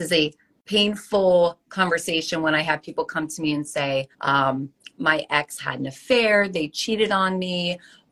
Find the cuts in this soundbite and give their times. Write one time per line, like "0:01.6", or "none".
0:04.1